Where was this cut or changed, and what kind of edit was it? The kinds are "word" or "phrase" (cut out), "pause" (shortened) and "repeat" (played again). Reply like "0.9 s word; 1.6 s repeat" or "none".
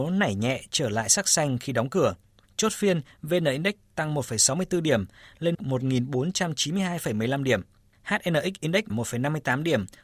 5.5 s word; 8.9 s word

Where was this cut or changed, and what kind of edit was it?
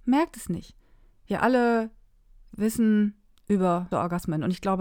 3.9 s word

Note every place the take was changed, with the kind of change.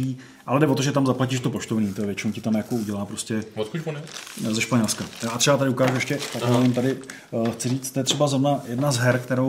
none

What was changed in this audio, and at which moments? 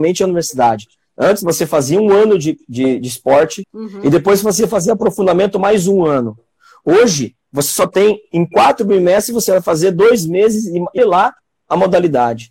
3.6 s word; 11.0 s word

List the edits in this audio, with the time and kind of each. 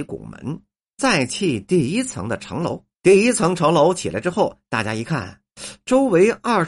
2.9 s pause

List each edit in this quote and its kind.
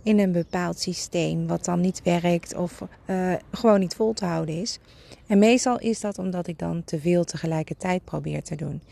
2.9 s pause

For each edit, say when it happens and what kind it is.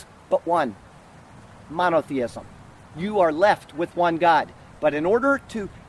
none

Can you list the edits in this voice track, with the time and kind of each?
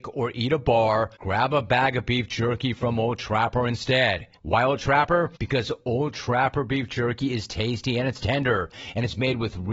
1.2 s pause; 4.4 s pause; 5.4 s pause

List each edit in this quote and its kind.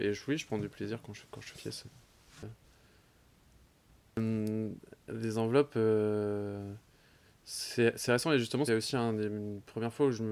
1.2 s word; 1.5 s word; 8.1 s word; 8.7 s word

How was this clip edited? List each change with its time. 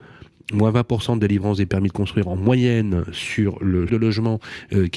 3.9 s word

